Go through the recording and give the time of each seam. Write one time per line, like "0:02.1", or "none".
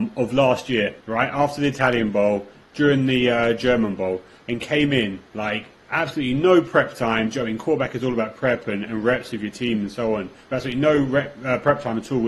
0:01.0
0:05.3